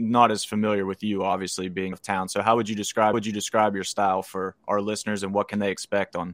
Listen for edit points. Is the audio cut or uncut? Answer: cut